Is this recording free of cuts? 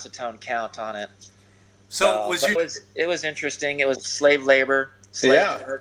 no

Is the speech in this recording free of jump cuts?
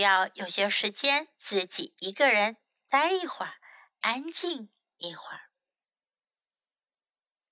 yes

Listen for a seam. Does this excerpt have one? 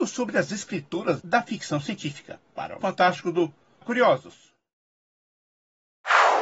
yes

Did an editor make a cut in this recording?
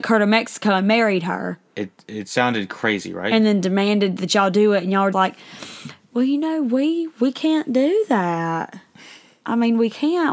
yes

